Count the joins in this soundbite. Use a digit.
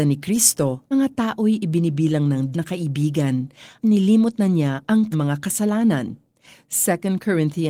4